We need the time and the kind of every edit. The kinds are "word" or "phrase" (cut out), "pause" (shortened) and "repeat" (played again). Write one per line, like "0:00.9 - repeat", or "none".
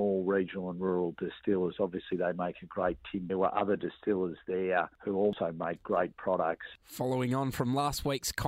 0:03.3 - phrase